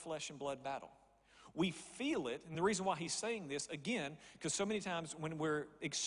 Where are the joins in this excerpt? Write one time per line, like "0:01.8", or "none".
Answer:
none

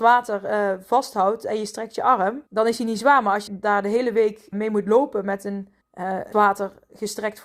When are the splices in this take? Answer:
0:02.5
0:03.5
0:04.5
0:05.8
0:06.3

